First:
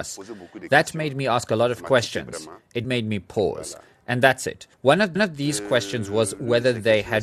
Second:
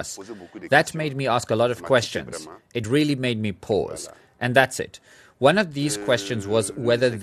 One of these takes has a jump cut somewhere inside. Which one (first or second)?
first